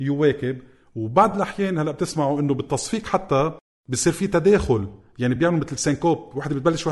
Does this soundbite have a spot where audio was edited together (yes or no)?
no